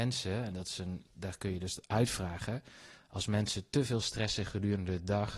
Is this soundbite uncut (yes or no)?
no